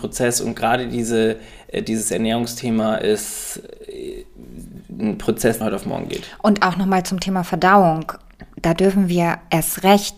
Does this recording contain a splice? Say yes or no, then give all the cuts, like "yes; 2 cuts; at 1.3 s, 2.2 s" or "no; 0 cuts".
yes; 1 cut; at 5.6 s